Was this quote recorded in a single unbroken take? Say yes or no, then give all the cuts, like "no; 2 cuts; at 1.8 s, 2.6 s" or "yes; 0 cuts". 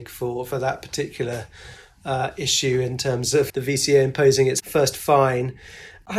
no; 1 cut; at 3.5 s